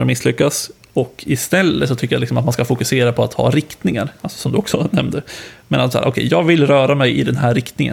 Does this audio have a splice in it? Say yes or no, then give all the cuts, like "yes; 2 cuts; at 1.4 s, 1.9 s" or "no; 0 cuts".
no; 0 cuts